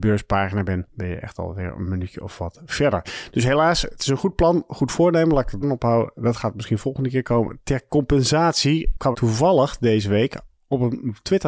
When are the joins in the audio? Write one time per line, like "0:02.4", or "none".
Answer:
0:05.6
0:09.1